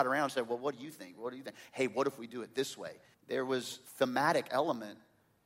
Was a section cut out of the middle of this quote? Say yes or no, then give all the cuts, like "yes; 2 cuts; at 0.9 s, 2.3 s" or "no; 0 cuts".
yes; 2 cuts; at 3.1 s, 3.9 s